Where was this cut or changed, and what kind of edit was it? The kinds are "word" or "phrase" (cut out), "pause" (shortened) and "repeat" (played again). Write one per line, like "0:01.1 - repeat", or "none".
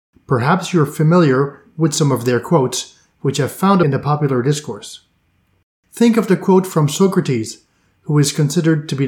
0:03.8 - phrase